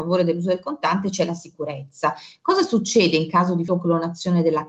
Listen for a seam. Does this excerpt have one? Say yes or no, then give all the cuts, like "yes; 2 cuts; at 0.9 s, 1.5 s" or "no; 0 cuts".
yes; 1 cut; at 3.7 s